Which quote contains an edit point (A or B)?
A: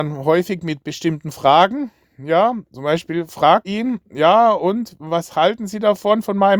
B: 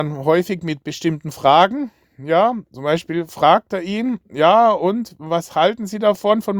A